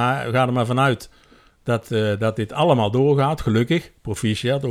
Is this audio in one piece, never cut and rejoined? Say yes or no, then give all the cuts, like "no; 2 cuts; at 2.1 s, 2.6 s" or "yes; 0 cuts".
yes; 0 cuts